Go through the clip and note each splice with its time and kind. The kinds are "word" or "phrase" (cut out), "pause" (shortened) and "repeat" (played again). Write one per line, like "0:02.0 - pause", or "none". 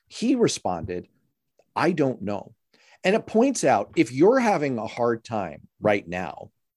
none